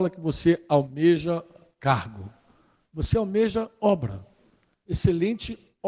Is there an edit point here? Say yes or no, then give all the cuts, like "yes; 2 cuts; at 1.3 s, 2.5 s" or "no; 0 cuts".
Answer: no; 0 cuts